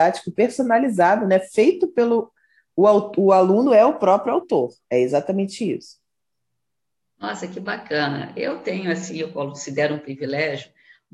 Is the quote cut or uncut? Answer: uncut